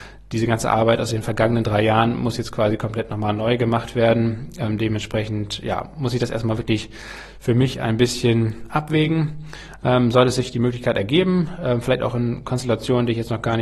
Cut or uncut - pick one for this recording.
uncut